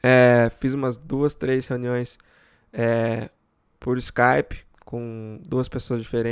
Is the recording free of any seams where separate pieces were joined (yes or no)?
yes